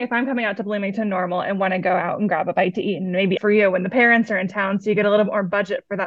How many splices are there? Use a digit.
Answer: 1